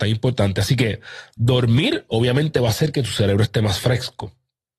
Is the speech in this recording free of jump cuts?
yes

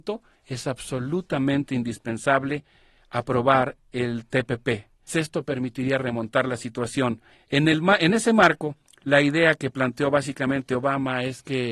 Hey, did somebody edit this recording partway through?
yes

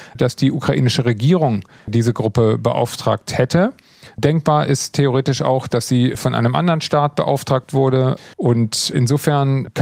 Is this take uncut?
no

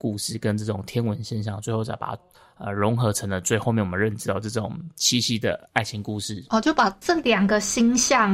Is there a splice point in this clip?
no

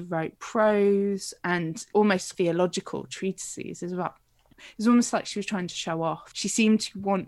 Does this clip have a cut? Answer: no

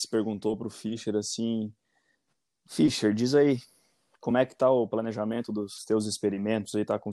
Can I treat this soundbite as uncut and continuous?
yes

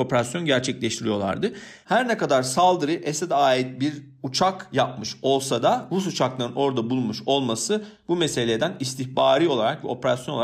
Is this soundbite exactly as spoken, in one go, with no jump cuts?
yes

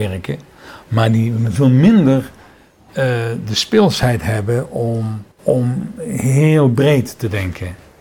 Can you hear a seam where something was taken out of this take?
yes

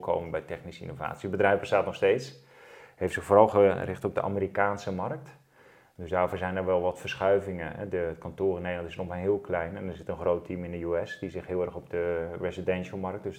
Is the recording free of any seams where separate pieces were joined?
yes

